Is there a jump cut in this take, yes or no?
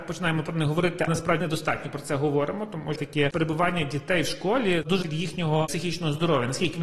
yes